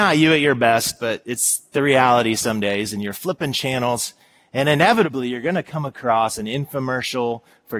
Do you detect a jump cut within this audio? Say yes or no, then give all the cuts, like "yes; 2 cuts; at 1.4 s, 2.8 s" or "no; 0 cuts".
no; 0 cuts